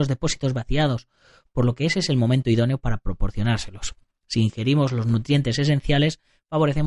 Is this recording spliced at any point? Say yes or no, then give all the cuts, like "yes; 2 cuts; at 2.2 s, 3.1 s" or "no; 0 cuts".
no; 0 cuts